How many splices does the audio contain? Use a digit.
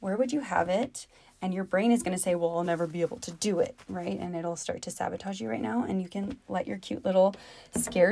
0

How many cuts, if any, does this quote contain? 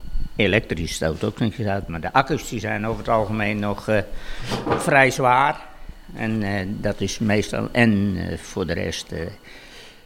0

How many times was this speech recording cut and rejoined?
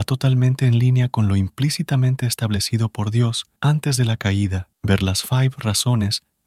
2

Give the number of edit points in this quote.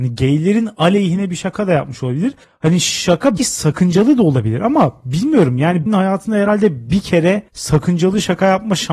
4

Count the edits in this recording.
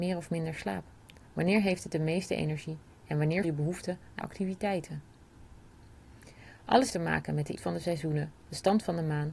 4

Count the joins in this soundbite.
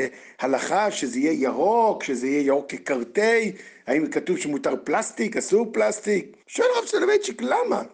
1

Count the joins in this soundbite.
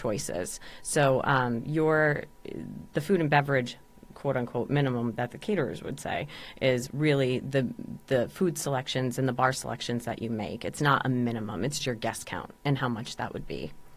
1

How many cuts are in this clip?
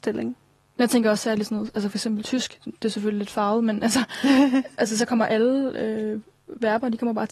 0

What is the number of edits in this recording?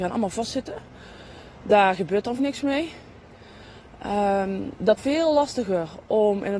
2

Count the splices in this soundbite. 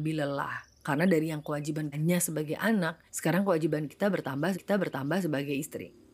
3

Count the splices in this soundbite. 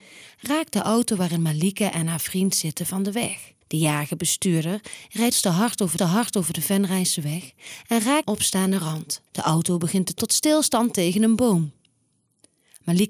6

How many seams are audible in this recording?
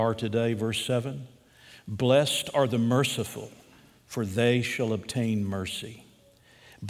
0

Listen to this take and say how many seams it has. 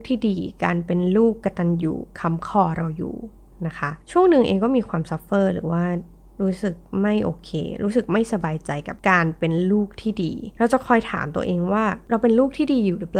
0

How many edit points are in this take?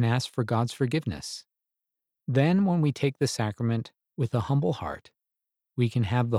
0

